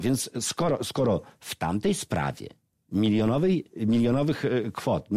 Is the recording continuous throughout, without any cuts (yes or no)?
yes